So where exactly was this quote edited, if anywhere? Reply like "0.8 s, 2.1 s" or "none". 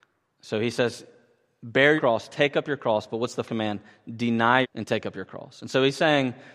2.0 s, 3.5 s, 4.6 s